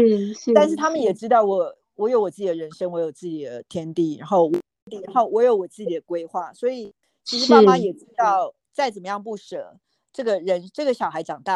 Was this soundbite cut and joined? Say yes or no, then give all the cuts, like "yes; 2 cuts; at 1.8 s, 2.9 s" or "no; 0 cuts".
no; 0 cuts